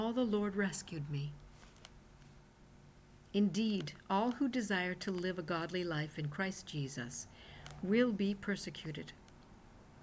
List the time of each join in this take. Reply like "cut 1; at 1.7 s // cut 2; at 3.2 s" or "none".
cut 1; at 3.2 s